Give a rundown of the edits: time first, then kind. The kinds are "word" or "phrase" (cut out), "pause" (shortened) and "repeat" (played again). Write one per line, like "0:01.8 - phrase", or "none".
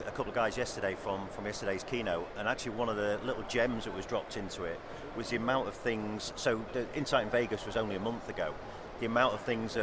none